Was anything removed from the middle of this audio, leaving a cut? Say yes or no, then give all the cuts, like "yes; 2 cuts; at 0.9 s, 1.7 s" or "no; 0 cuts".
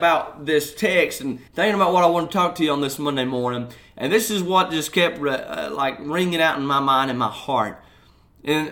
yes; 1 cut; at 1.5 s